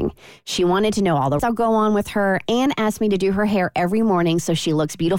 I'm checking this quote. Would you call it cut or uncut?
cut